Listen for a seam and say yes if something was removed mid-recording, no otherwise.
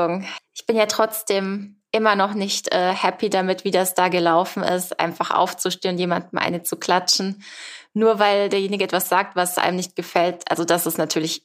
no